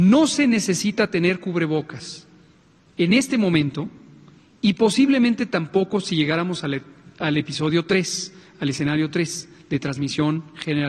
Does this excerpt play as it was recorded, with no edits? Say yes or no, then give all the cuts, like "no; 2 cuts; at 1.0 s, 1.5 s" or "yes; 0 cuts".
yes; 0 cuts